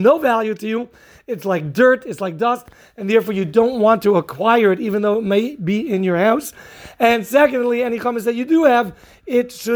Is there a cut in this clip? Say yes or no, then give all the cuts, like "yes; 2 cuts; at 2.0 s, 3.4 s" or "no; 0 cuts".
no; 0 cuts